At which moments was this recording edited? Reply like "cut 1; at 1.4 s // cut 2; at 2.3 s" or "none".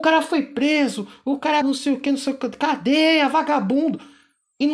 cut 1; at 1.6 s